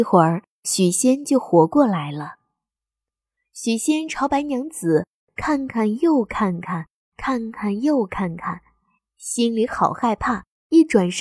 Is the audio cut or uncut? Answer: uncut